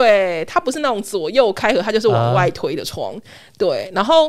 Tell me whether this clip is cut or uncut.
uncut